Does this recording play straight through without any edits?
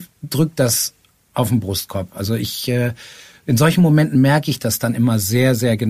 yes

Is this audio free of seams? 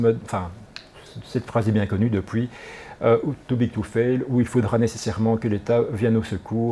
yes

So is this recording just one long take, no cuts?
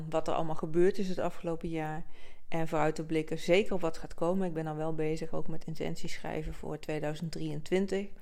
yes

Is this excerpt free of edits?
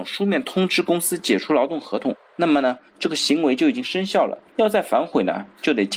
no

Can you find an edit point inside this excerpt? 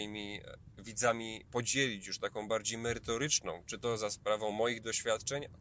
no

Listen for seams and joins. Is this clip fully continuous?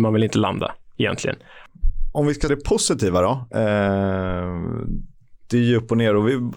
no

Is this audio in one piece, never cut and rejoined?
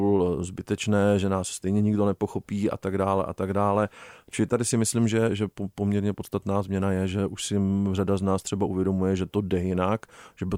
yes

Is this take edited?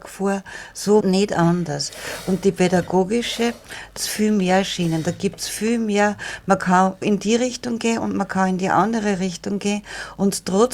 yes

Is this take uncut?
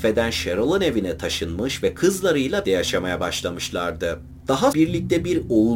no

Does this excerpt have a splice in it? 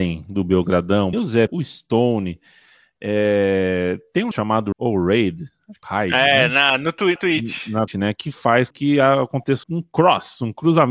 yes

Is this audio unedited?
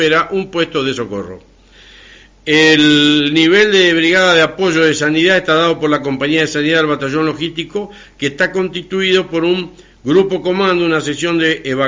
yes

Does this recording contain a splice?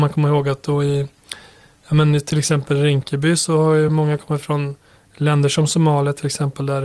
no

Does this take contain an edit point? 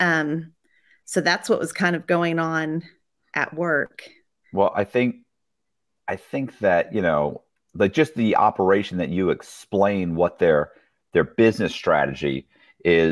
no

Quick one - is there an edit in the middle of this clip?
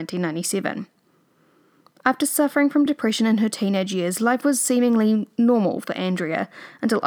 no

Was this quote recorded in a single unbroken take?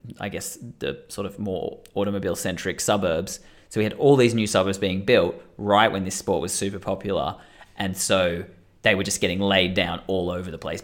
yes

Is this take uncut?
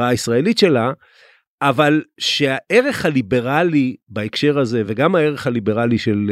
yes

